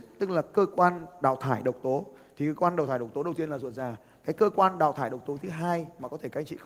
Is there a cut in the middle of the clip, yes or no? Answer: no